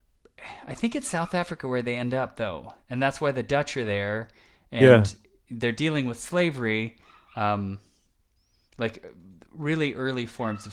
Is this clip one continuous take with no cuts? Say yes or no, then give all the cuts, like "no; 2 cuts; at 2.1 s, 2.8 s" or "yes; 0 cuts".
yes; 0 cuts